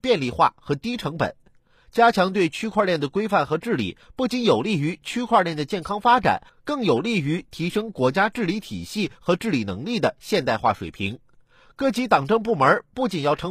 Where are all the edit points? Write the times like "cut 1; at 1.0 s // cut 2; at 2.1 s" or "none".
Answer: none